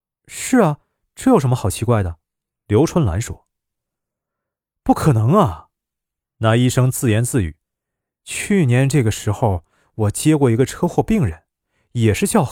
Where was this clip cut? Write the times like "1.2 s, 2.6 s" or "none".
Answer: 2.2 s, 7.6 s